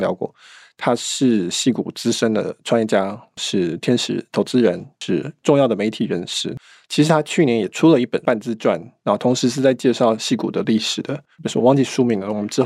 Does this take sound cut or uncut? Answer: cut